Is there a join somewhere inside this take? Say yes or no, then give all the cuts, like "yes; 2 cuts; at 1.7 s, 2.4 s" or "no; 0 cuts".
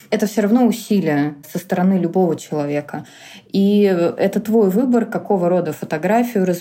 no; 0 cuts